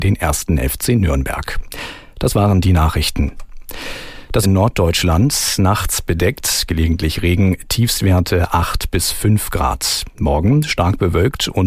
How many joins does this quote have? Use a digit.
1